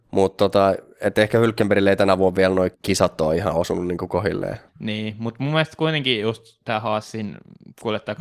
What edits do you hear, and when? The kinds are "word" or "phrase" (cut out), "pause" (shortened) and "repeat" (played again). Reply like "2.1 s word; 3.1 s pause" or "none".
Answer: 2.7 s pause; 4.7 s pause